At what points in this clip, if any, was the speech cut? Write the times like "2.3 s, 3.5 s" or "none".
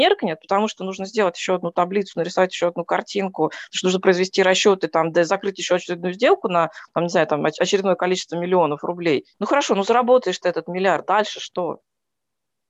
9.3 s